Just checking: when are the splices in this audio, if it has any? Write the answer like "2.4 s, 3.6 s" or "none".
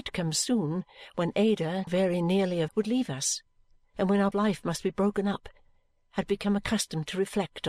1.9 s, 2.7 s, 4.3 s